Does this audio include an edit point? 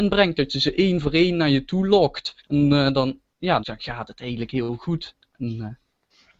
yes; 2 cuts; at 2.4 s, 3.6 s

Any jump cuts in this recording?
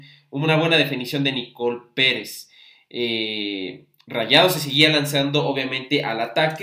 no; 0 cuts

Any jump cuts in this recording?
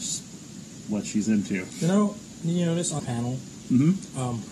yes; 1 cut; at 3.0 s

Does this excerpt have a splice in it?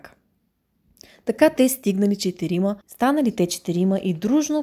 yes; 1 cut; at 2.8 s

